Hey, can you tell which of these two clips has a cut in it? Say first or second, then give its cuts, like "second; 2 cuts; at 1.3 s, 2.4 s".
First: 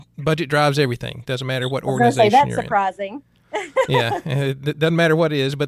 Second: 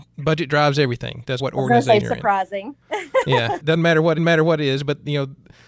second; 5 cuts; at 1.4 s, 2.0 s, 2.8 s, 3.6 s, 4.2 s